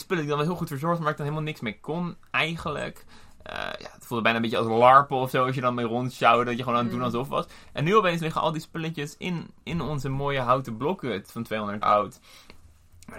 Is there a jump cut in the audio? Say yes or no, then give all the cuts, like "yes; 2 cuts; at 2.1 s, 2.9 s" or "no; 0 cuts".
yes; 2 cuts; at 9.6 s, 11.8 s